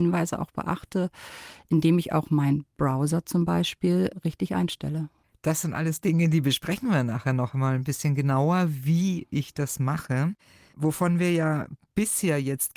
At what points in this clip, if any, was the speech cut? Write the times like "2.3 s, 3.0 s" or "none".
none

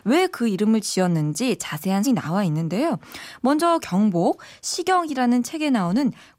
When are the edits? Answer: 2.0 s, 3.8 s

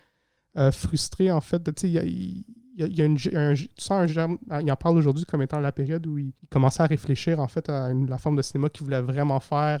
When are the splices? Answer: 6.4 s

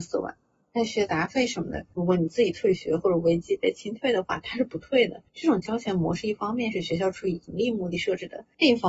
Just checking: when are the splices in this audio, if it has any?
5.3 s

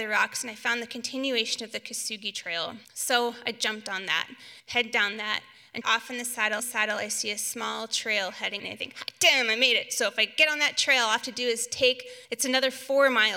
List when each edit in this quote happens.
2.8 s, 4.6 s, 5.8 s, 6.6 s, 8.6 s, 12.3 s

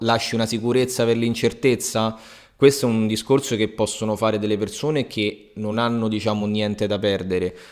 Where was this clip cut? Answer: none

